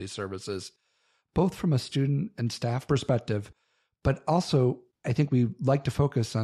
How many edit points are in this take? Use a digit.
0